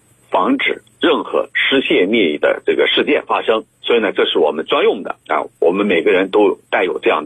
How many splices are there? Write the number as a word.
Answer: two